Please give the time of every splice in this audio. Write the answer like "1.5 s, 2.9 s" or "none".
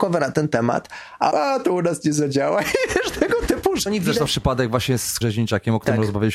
1.3 s, 3.9 s, 4.3 s, 5.2 s